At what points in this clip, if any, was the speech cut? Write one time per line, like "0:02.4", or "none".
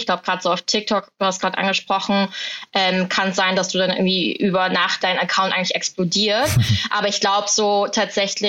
0:05.0

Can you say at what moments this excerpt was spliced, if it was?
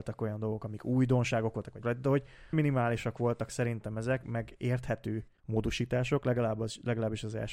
0:01.8
0:02.5
0:04.2
0:05.4

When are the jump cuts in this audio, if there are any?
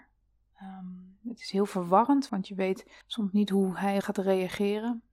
0:02.3
0:03.0
0:04.0

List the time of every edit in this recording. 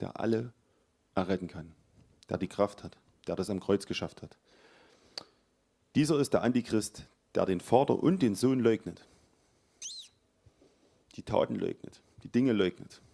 none

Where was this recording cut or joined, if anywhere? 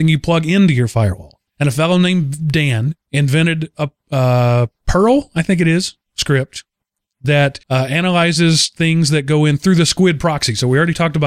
0:01.5
0:03.0
0:07.6

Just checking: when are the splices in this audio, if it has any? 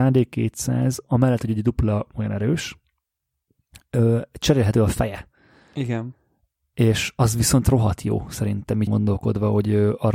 0:08.9

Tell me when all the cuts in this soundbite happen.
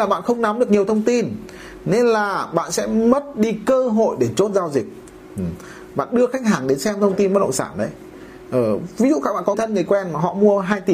0:09.5

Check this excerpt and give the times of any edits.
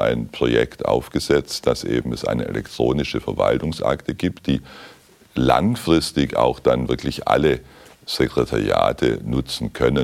none

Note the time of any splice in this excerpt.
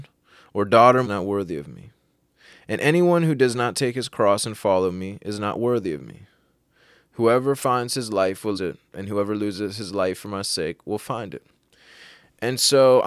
0:01.0
0:08.5

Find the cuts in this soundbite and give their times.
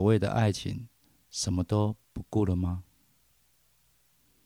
0:01.0

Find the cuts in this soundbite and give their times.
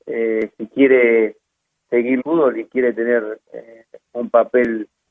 0:02.2

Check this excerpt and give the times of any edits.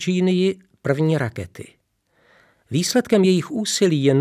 none

